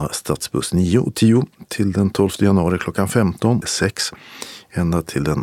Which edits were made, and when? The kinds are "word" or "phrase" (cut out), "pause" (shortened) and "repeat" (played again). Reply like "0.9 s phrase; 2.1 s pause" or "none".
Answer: 3.6 s phrase